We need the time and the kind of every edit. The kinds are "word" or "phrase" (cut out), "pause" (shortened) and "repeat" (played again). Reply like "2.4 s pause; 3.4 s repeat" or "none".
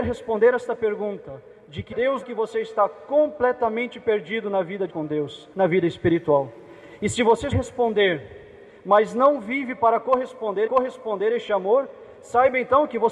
1.9 s word; 2.2 s phrase; 4.9 s word; 5.5 s pause; 7.5 s word; 10.7 s repeat